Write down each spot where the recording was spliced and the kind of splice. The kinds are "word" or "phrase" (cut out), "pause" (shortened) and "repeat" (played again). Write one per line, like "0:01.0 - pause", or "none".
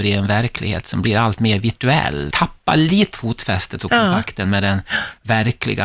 0:02.3 - phrase
0:03.1 - word